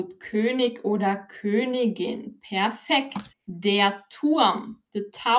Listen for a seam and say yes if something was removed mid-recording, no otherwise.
yes